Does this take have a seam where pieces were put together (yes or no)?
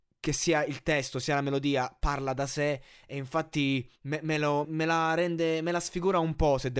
yes